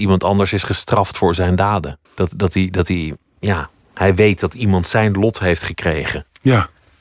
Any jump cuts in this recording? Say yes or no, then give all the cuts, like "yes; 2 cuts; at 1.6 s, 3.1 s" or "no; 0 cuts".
yes; 1 cut; at 2.1 s